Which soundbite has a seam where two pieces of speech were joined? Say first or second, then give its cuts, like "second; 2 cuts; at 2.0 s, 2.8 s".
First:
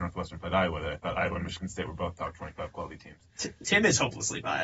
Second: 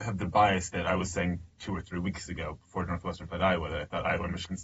second; 1 cut; at 1.5 s